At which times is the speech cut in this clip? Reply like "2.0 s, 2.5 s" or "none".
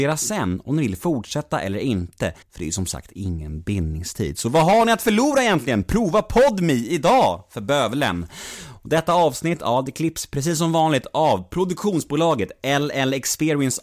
2.4 s